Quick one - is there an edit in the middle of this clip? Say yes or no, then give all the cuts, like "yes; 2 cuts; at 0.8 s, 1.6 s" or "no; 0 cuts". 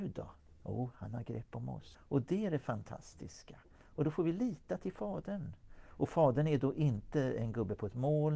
no; 0 cuts